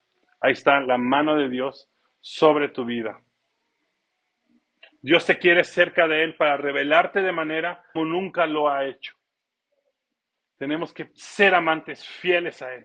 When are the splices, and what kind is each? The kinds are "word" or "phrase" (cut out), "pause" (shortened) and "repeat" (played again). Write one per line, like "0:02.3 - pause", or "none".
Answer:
0:08.0 - word